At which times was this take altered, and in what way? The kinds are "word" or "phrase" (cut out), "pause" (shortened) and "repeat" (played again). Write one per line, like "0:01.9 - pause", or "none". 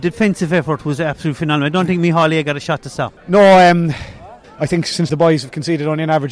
0:03.2 - pause
0:04.4 - pause
0:05.1 - phrase